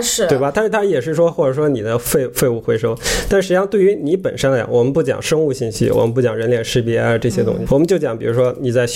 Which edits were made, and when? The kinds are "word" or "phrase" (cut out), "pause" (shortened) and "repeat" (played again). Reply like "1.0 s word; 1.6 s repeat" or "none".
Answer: 7.7 s word

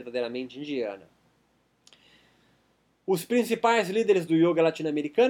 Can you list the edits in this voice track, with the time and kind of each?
none

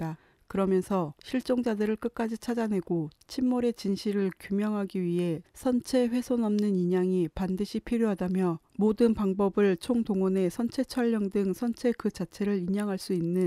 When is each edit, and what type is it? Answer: 1.2 s pause; 8.7 s pause

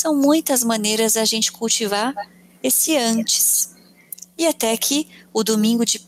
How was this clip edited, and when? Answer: none

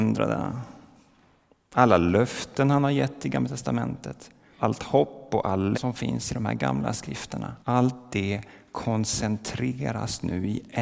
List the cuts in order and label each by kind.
4.6 s word; 5.7 s word; 7.6 s pause

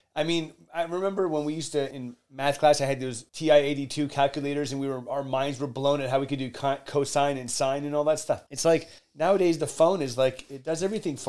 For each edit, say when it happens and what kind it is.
1.9 s word; 3.3 s pause; 8.5 s pause; 9.0 s pause

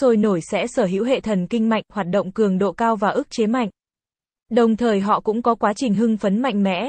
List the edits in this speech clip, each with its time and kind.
none

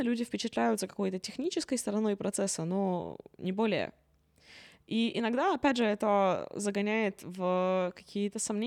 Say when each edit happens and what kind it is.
none

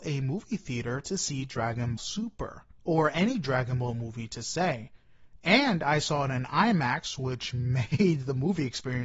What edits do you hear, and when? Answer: 2.0 s word

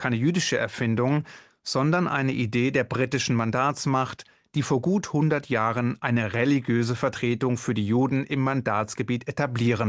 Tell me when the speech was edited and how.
none

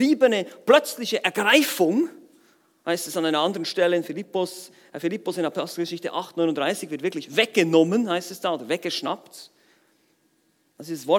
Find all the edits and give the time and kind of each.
none

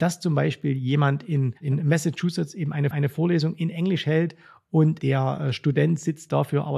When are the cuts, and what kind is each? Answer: 1.6 s pause; 2.9 s repeat

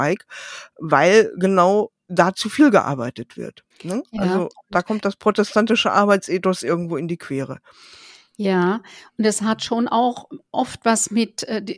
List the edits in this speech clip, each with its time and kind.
2.0 s pause; 3.7 s pause

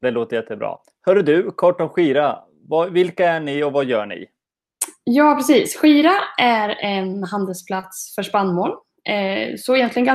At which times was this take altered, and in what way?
none

